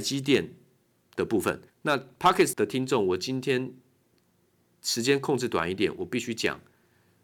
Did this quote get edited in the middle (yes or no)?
yes